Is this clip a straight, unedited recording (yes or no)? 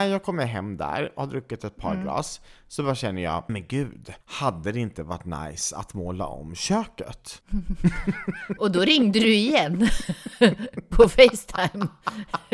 no